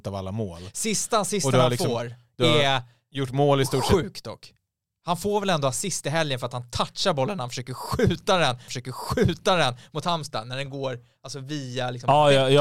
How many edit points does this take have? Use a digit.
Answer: 1